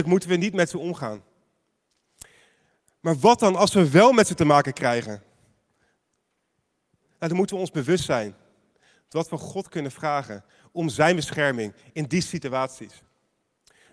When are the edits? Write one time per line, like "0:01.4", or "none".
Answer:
none